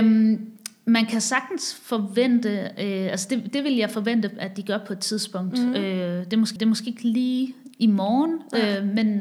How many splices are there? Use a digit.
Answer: 1